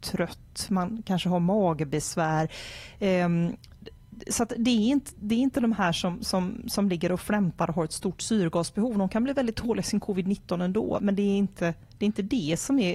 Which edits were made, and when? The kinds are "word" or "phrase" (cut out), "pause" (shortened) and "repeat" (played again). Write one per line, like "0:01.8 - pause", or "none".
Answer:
none